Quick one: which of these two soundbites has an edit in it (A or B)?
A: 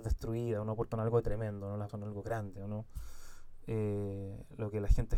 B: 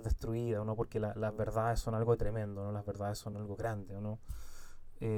A